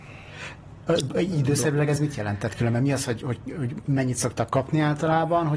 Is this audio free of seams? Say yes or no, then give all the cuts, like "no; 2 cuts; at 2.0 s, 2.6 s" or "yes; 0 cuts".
yes; 0 cuts